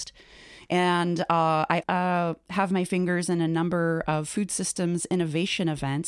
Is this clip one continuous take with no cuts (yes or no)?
no